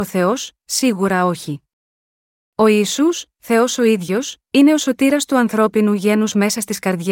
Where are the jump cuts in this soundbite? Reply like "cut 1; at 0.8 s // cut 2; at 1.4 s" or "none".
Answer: none